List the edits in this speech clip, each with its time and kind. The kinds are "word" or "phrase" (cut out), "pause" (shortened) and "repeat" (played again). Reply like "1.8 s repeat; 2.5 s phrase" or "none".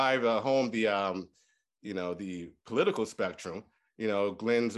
none